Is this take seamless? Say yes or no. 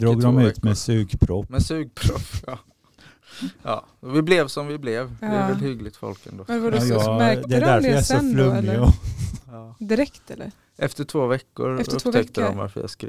yes